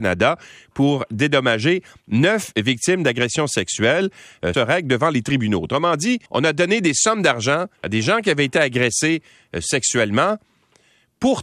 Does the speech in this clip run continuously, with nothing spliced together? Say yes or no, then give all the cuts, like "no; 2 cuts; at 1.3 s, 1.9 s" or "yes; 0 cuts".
no; 3 cuts; at 4.5 s, 6.3 s, 7.7 s